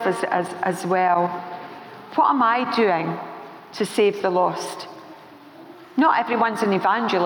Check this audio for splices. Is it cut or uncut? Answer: uncut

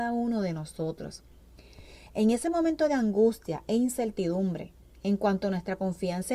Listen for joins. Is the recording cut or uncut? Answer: uncut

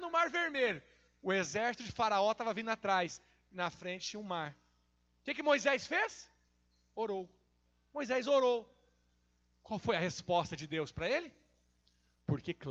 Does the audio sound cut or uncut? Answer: uncut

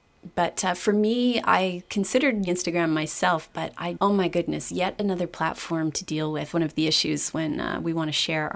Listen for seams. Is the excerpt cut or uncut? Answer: cut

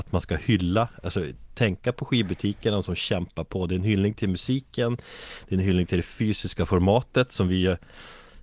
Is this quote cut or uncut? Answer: uncut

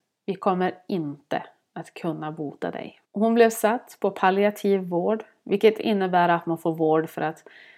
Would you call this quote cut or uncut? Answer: cut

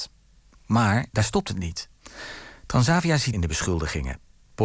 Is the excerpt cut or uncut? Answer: cut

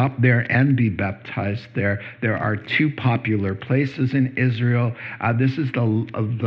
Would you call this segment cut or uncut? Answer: uncut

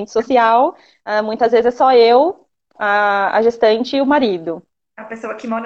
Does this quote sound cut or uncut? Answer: uncut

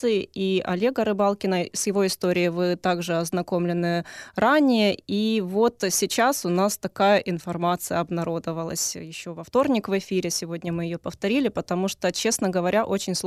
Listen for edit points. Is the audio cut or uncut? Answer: uncut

